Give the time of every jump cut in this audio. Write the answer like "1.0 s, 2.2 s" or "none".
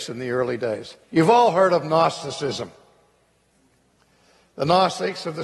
1.0 s